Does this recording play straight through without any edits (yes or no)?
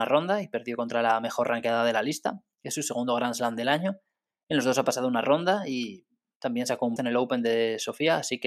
no